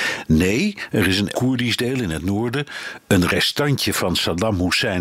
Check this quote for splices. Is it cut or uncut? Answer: cut